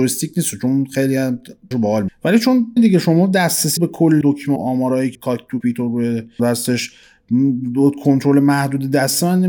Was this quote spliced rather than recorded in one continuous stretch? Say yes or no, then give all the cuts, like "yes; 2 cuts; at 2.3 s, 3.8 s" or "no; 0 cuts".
yes; 9 cuts; at 1.7 s, 2.1 s, 2.8 s, 3.8 s, 4.2 s, 4.6 s, 5.1 s, 5.6 s, 6.4 s